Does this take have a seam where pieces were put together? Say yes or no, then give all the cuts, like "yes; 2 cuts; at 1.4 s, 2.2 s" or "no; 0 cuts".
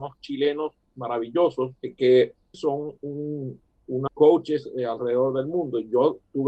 yes; 3 cuts; at 1.8 s, 2.5 s, 4.1 s